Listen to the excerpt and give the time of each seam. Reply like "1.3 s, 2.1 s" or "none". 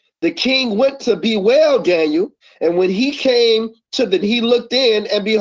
2.4 s, 4.2 s